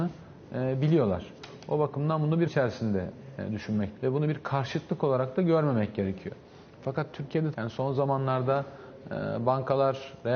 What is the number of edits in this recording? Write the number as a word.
three